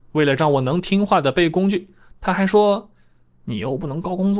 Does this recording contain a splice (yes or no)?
no